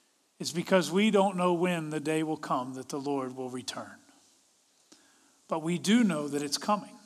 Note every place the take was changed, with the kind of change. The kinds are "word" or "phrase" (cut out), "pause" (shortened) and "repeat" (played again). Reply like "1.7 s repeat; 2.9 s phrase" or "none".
none